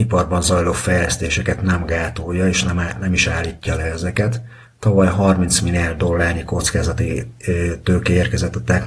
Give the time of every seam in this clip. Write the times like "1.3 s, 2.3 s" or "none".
none